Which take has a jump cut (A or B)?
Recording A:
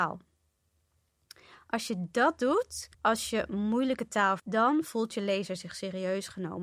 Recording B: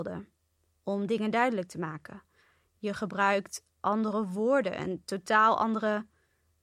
A